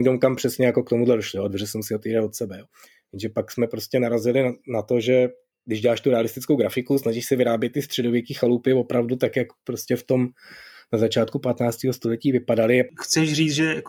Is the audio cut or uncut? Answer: uncut